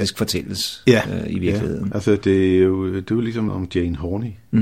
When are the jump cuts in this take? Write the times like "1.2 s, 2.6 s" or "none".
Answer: 2.2 s, 3.5 s